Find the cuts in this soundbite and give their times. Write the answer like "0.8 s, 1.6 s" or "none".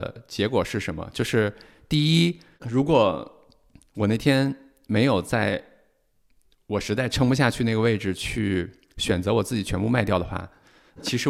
none